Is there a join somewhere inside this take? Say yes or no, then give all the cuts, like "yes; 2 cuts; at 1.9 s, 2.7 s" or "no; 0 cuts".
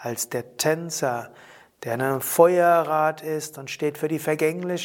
no; 0 cuts